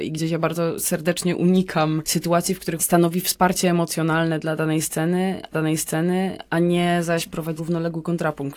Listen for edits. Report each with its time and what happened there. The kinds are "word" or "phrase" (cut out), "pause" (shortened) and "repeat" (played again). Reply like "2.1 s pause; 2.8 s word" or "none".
2.8 s word; 5.5 s repeat; 7.6 s word